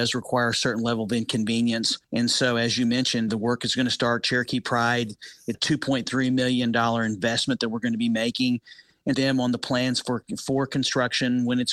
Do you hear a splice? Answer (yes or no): yes